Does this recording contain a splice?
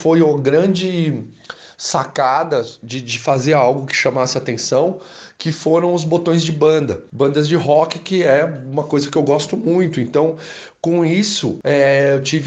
no; 0 cuts

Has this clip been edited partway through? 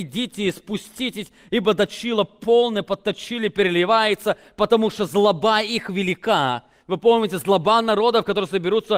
no; 0 cuts

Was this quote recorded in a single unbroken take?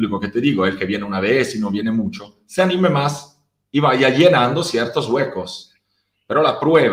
yes; 0 cuts

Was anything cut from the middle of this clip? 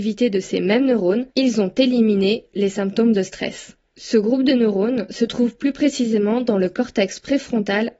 yes; 2 cuts; at 1.3 s, 3.9 s

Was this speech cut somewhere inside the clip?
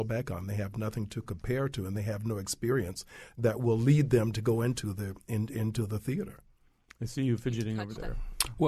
no; 0 cuts

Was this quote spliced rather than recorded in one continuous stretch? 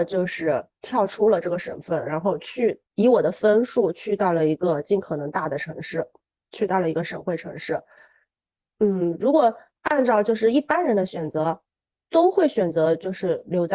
no; 0 cuts

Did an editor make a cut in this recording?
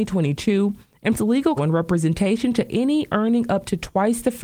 yes; 2 cuts; at 1.1 s, 1.6 s

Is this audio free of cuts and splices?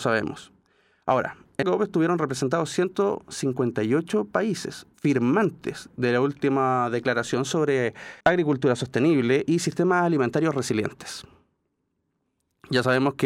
no; 2 cuts; at 1.6 s, 8.2 s

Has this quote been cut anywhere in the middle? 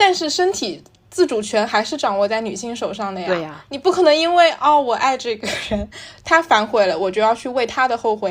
no; 0 cuts

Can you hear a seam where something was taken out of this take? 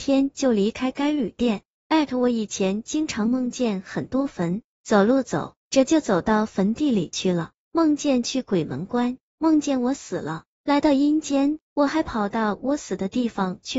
yes; 2 cuts; at 5.6 s, 11.6 s

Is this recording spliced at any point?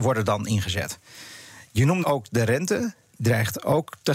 yes; 2 cuts; at 2.0 s, 3.1 s

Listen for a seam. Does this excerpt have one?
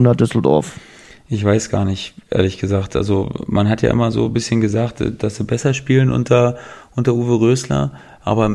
no; 0 cuts

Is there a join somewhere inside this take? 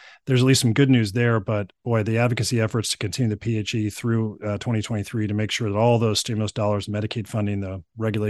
no; 0 cuts

